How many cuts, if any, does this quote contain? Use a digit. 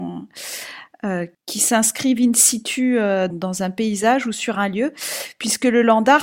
1